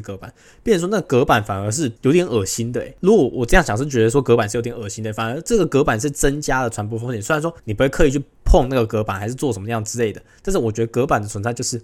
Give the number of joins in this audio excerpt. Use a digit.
2